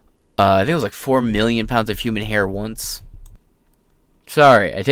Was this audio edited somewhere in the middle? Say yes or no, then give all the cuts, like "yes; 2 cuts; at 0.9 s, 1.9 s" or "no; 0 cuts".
no; 0 cuts